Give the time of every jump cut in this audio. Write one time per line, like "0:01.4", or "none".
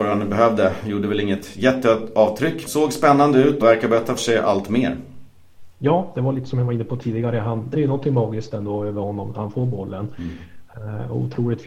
0:02.7
0:03.6
0:04.2
0:07.7